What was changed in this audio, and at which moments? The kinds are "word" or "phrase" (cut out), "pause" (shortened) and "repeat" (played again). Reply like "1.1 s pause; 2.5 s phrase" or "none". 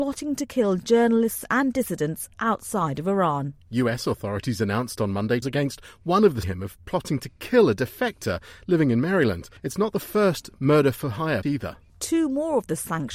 5.4 s word; 6.4 s phrase; 9.6 s pause; 11.4 s word